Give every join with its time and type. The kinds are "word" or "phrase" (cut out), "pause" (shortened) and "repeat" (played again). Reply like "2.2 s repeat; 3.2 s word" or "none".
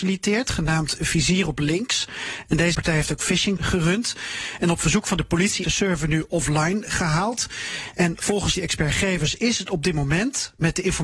2.7 s word; 3.6 s word; 5.6 s word; 8.5 s word